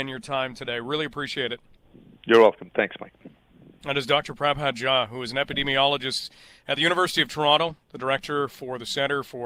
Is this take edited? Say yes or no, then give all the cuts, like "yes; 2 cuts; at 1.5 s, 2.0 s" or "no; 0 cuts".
no; 0 cuts